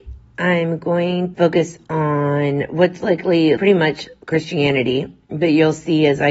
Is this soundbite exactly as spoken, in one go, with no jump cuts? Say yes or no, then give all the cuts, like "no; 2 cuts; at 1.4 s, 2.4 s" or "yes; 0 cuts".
no; 3 cuts; at 1.3 s, 3.0 s, 3.6 s